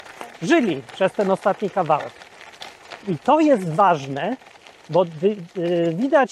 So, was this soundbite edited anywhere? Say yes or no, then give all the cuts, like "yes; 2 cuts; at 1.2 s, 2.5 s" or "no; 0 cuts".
no; 0 cuts